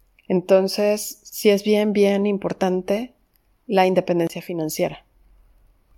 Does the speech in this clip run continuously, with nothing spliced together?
yes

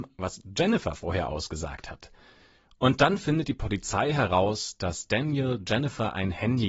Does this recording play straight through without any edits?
yes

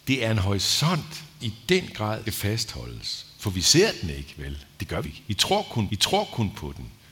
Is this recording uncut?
no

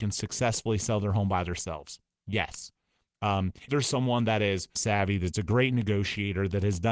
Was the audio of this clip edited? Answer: yes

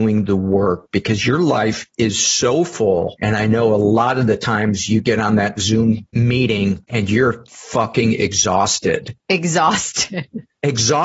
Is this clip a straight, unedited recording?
yes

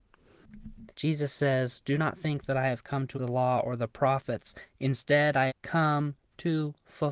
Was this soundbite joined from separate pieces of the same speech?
yes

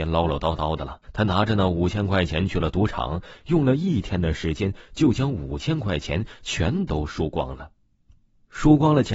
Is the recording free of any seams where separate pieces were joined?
no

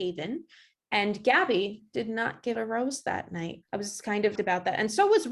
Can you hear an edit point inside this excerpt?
yes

